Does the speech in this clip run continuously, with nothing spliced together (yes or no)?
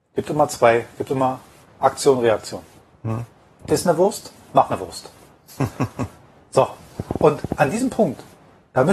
yes